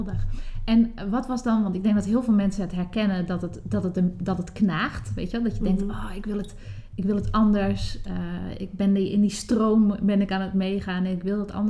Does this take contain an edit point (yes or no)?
no